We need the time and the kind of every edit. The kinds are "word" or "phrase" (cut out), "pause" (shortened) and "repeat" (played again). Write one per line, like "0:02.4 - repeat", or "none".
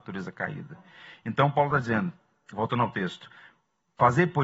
none